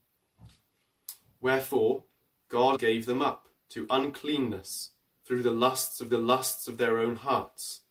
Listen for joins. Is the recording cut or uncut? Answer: cut